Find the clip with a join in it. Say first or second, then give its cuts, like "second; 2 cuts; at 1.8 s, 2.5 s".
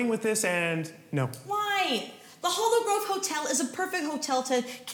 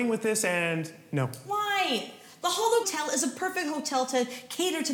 second; 1 cut; at 2.8 s